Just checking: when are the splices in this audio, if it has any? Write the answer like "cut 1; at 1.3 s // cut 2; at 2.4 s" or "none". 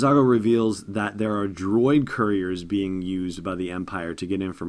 none

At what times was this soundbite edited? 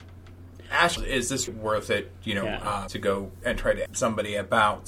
cut 1; at 1.0 s // cut 2; at 1.5 s // cut 3; at 2.9 s // cut 4; at 3.9 s

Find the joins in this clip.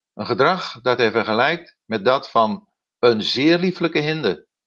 none

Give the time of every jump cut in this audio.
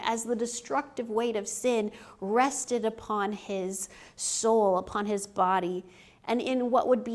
none

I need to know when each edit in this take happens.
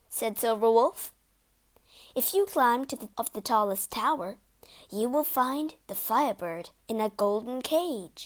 cut 1; at 3.1 s

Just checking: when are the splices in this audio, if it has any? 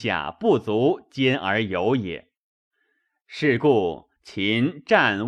none

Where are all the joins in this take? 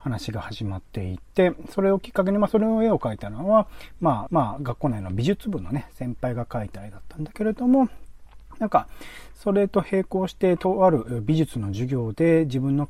cut 1; at 4.3 s

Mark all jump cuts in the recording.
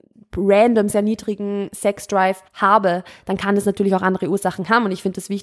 cut 1; at 0.9 s // cut 2; at 2.5 s

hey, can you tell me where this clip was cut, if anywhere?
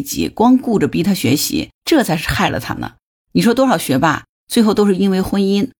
cut 1; at 1.7 s

